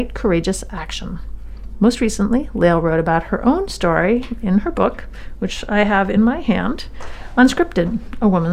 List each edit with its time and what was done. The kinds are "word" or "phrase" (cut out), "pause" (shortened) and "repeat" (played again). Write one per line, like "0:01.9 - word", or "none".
none